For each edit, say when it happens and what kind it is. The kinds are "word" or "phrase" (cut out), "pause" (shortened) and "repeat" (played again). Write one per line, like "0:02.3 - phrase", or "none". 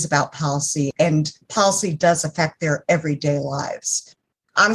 none